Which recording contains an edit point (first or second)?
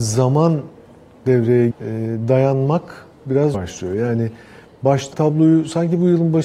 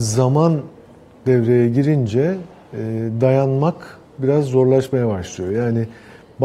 first